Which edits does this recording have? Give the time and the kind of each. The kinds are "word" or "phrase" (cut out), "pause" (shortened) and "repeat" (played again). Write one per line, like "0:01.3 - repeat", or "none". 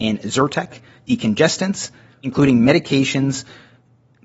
0:01.0 - word